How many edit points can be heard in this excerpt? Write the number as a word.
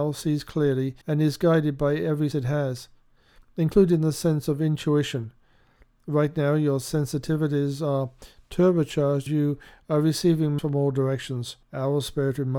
five